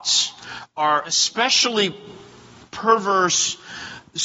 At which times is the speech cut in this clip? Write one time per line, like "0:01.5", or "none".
0:01.0